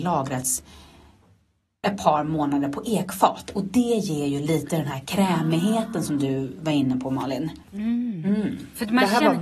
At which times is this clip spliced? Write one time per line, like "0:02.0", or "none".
0:07.6